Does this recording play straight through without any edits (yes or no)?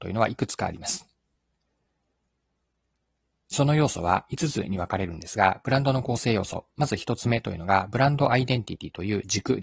yes